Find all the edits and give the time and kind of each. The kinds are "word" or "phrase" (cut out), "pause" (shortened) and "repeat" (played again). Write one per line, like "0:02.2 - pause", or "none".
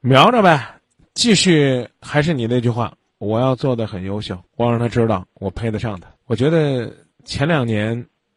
0:04.5 - pause
0:06.2 - pause